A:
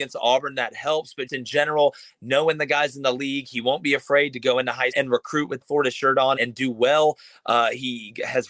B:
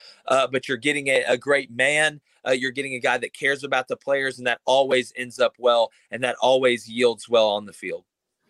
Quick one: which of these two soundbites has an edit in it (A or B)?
A